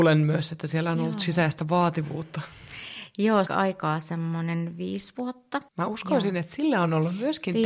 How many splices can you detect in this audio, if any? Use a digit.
2